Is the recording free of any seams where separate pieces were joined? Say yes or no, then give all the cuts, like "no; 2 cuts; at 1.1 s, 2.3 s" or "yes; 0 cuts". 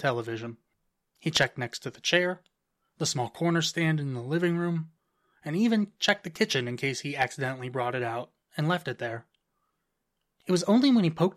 yes; 0 cuts